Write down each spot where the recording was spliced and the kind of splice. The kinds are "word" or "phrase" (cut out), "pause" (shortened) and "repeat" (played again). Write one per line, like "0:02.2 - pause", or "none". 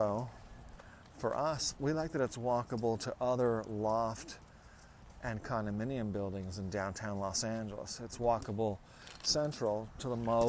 none